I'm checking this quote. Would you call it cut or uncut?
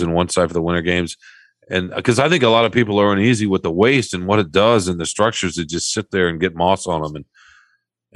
uncut